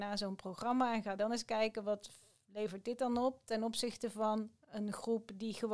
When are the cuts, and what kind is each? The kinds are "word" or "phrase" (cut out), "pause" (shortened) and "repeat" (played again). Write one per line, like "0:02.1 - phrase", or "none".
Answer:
none